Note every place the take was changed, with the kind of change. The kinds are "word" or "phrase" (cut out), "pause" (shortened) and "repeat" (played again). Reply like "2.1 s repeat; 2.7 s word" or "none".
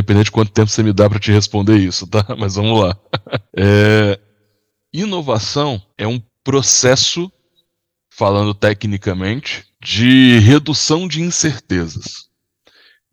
3.5 s pause; 5.9 s pause; 6.3 s pause; 9.7 s pause